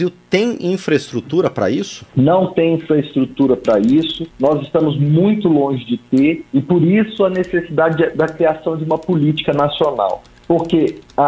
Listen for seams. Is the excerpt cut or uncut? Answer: cut